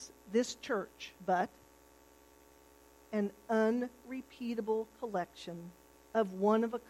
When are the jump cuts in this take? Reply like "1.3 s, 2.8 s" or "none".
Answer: 1.2 s